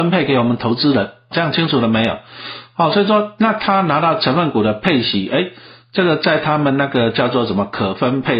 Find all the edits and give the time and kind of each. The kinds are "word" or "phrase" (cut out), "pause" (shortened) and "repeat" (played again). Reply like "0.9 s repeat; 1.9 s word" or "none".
1.3 s word